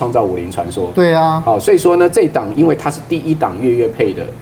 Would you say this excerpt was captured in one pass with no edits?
yes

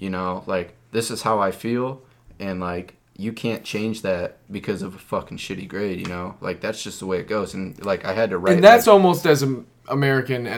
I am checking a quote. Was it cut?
no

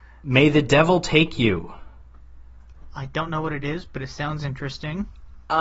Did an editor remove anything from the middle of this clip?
no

